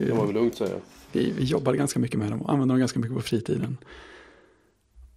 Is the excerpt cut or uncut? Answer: uncut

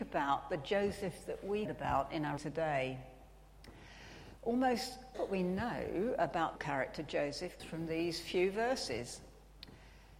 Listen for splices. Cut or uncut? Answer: cut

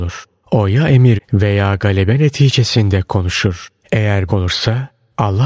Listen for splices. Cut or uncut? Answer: cut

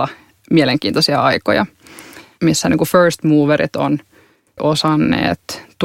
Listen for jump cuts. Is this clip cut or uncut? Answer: cut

